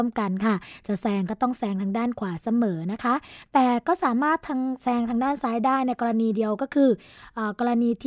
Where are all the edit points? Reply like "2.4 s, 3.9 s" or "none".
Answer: none